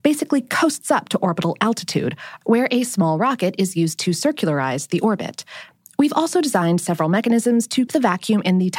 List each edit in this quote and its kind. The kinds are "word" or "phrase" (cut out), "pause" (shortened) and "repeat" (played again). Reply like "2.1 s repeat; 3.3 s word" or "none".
7.9 s word